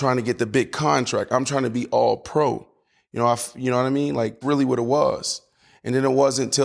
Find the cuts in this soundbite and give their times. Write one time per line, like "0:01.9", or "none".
0:04.4